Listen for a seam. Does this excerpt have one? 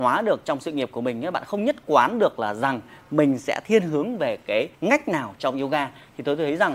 yes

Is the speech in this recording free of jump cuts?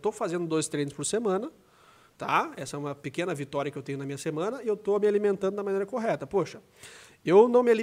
yes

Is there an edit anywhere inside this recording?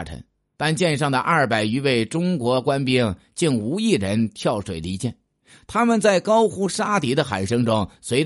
no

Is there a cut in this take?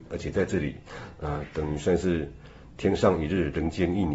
no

